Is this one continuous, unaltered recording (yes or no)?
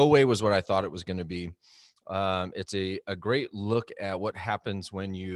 yes